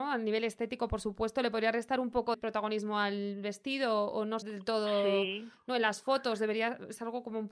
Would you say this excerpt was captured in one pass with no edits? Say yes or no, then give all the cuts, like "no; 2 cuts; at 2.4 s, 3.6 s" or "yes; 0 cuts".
no; 2 cuts; at 2.3 s, 4.4 s